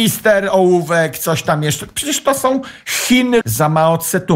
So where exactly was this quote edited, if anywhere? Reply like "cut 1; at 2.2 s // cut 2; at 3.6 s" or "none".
cut 1; at 3.4 s